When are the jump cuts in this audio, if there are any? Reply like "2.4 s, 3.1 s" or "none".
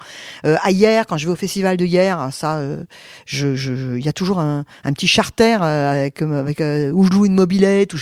none